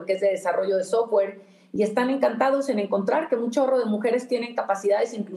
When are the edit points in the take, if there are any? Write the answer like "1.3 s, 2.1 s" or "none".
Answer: none